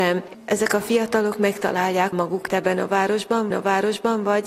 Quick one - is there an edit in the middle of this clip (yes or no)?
yes